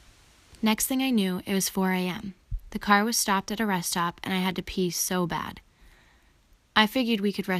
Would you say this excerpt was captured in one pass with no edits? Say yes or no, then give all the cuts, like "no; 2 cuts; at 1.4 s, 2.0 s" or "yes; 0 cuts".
yes; 0 cuts